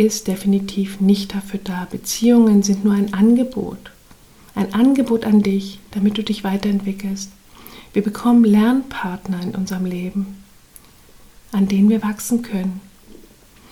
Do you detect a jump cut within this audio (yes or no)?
no